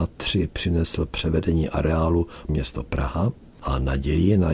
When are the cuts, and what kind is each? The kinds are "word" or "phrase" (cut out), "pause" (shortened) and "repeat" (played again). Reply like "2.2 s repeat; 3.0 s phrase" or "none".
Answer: 2.5 s phrase